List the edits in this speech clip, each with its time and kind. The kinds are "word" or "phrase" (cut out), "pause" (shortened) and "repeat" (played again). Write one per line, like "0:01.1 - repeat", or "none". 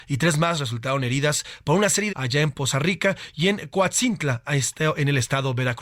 0:02.1 - phrase